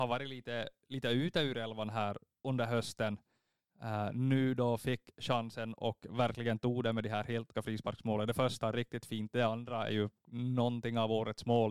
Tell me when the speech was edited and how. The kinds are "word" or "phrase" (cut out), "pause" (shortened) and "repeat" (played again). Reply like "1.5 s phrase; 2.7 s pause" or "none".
2.4 s word; 7.5 s word